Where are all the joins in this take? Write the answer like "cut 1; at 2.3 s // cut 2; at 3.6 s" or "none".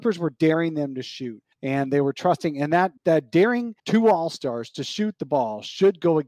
cut 1; at 1.5 s // cut 2; at 3.0 s // cut 3; at 3.8 s